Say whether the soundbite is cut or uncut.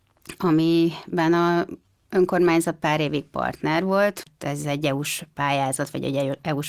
uncut